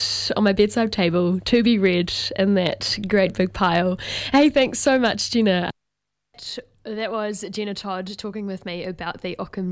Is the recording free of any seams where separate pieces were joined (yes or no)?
yes